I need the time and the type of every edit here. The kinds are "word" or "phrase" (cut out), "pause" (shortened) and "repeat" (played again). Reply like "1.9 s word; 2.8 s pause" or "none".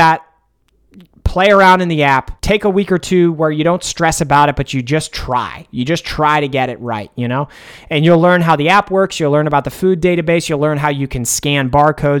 2.4 s pause